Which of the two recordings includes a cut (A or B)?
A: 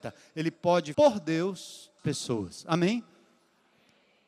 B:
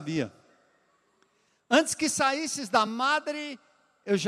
A